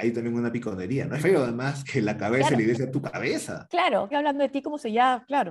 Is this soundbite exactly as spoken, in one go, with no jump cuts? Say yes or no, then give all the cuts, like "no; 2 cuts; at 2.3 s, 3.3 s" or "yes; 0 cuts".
no; 4 cuts; at 1.2 s, 1.8 s, 2.9 s, 4.1 s